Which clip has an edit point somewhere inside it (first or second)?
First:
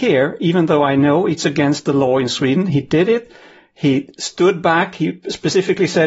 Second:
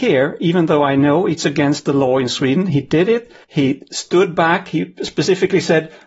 second